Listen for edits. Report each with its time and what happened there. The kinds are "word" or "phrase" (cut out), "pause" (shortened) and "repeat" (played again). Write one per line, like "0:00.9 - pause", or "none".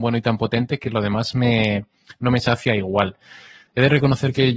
none